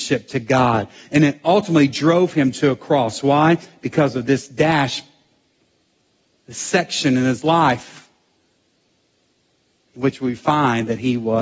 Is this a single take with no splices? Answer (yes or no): yes